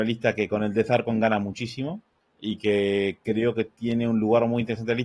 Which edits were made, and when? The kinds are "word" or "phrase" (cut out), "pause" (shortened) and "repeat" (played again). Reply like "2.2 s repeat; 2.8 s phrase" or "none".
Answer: 2.2 s pause